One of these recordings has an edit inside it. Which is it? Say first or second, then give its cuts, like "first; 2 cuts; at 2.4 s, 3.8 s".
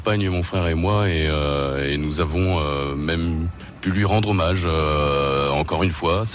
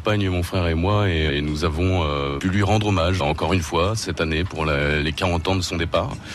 second; 3 cuts; at 1.3 s, 2.4 s, 3.2 s